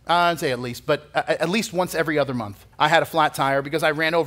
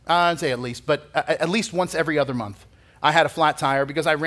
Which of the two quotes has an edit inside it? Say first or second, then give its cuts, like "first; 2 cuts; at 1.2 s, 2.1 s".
first; 1 cut; at 2.7 s